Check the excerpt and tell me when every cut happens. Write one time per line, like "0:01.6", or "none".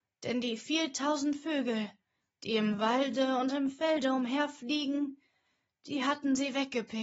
none